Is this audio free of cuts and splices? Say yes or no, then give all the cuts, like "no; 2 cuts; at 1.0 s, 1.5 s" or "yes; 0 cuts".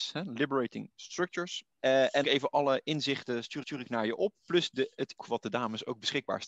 no; 4 cuts; at 1.7 s, 2.2 s, 3.6 s, 5.2 s